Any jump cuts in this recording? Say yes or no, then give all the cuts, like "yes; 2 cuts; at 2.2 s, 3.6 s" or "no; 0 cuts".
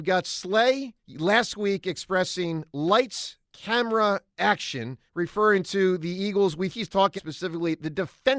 yes; 5 cuts; at 1.0 s, 3.5 s, 5.1 s, 6.7 s, 7.2 s